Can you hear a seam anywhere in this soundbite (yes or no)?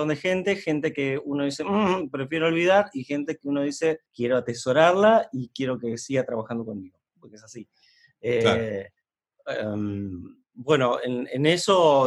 yes